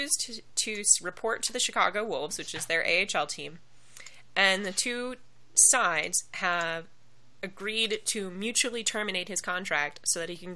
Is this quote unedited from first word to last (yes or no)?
yes